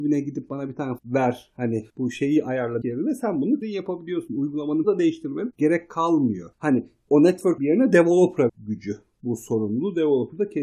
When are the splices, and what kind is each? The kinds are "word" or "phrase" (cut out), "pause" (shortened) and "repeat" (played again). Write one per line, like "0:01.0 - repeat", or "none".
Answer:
0:01.0 - word
0:01.9 - pause
0:02.8 - word
0:03.6 - word
0:04.8 - word
0:06.5 - pause
0:07.6 - word
0:08.5 - word